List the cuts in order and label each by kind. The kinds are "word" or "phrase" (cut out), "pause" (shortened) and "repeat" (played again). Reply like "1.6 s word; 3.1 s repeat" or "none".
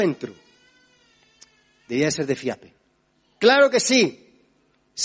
3.1 s pause

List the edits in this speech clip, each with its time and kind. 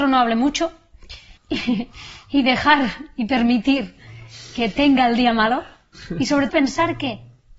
1.4 s pause; 6.5 s word

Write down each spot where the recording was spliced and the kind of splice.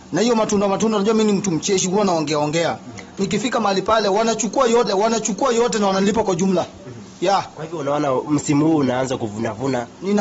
4.9 s repeat

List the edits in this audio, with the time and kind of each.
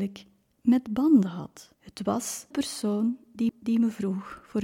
1.7 s pause; 2.5 s word; 3.5 s repeat

